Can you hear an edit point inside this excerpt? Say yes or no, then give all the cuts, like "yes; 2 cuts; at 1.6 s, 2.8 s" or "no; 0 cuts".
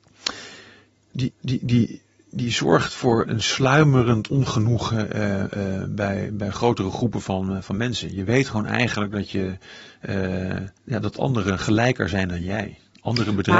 yes; 3 cuts; at 1.3 s, 3.2 s, 10.8 s